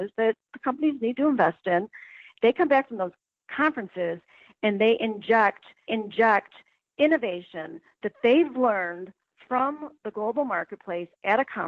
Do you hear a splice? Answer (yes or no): yes